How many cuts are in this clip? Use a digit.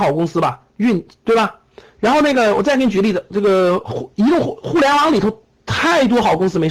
2